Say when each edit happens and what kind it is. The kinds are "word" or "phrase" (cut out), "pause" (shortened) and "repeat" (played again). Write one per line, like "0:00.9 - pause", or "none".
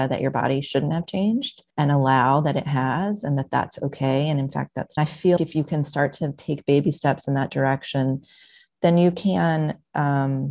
0:01.7 - pause
0:05.0 - phrase
0:05.4 - word